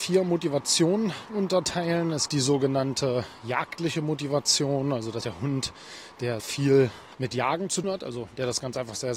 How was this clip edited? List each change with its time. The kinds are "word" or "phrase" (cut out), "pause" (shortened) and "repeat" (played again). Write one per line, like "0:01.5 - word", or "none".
0:02.3 - word
0:05.2 - word
0:06.4 - word
0:07.1 - word
0:07.8 - word

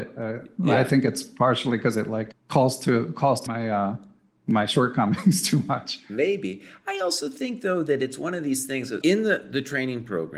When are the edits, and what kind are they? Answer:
0:02.3 - word
0:03.5 - word
0:09.0 - word

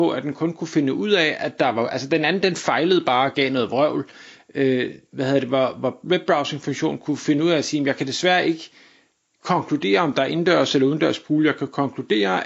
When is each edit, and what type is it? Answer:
none

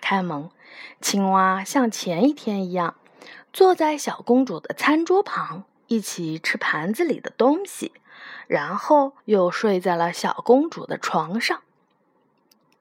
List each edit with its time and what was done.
0:09.2 - pause

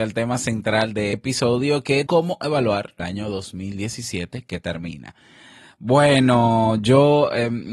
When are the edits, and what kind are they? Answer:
0:01.1 - word
0:02.1 - word
0:03.0 - word

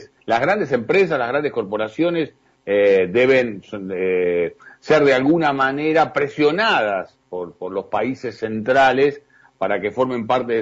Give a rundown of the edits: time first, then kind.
none

